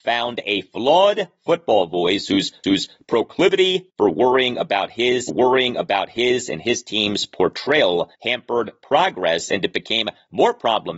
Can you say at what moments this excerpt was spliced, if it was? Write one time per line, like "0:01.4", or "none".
0:02.6
0:05.3
0:08.1